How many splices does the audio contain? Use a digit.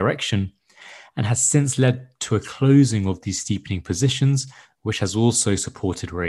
0